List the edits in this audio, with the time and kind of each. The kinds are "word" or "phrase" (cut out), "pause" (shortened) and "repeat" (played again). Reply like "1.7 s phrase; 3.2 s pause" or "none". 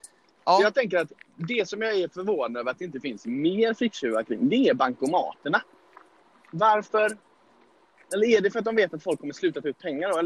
none